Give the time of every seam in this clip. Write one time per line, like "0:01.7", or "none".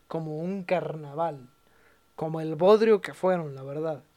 none